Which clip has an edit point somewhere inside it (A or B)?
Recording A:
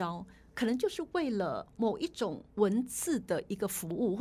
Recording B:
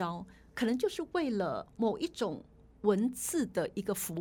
A